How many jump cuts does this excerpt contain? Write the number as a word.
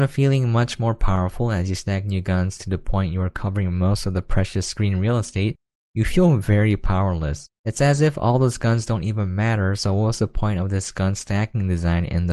one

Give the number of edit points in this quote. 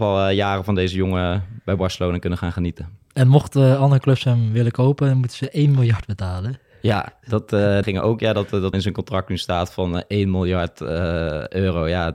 two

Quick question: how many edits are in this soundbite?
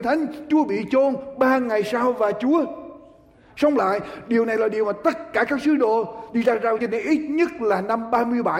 one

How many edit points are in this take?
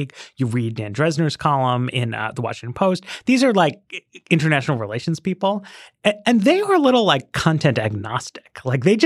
zero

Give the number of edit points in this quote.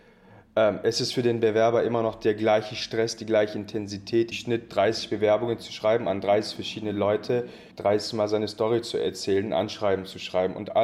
two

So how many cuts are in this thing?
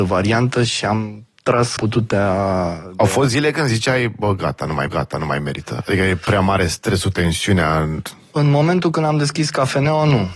two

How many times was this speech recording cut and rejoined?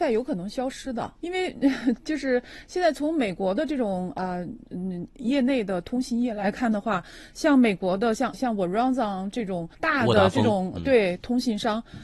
three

